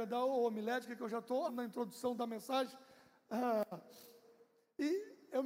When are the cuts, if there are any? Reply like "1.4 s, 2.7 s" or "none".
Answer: 1.5 s